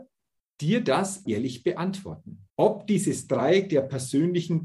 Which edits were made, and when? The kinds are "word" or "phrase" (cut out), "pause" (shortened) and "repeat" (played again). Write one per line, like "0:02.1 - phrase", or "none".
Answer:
0:01.3 - word
0:02.5 - pause